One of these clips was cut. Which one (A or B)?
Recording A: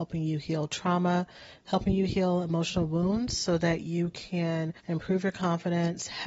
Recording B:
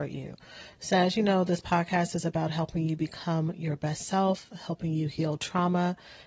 A